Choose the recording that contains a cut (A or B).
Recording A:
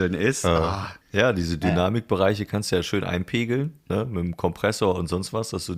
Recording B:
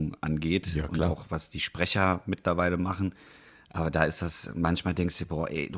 A